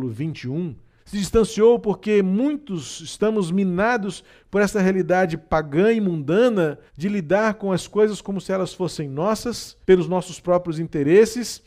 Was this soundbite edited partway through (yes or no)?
yes